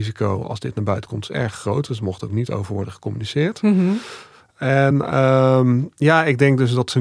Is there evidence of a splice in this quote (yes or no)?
no